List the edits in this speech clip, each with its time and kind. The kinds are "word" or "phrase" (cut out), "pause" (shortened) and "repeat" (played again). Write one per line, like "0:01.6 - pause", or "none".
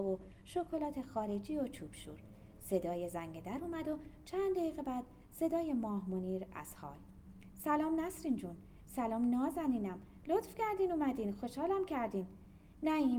none